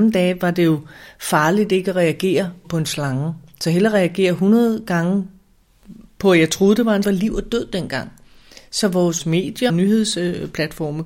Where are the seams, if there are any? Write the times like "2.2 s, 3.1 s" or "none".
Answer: 2.6 s, 7.0 s, 9.7 s